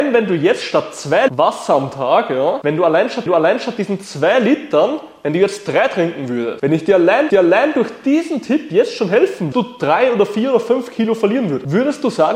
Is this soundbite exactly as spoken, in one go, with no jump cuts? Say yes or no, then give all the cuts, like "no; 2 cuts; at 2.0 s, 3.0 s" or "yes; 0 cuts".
no; 4 cuts; at 1.3 s, 3.3 s, 7.3 s, 9.5 s